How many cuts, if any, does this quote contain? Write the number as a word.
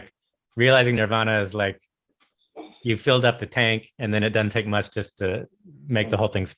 zero